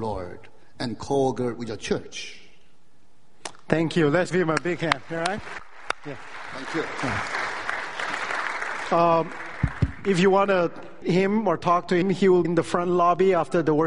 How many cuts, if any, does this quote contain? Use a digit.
4